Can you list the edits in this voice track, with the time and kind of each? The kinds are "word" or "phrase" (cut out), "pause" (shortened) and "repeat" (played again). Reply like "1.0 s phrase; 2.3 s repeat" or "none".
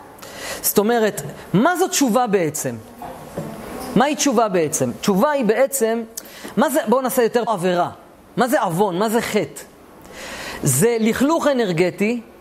7.5 s phrase